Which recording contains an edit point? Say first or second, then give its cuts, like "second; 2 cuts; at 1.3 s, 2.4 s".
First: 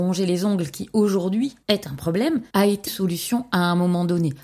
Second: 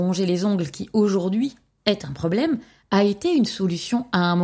first; 3 cuts; at 1.6 s, 2.5 s, 2.9 s